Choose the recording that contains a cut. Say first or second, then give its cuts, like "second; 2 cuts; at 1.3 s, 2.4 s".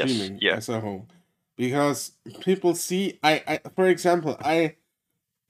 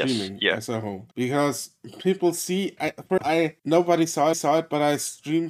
second; 5 cuts; at 1.1 s, 2.8 s, 3.2 s, 3.6 s, 4.3 s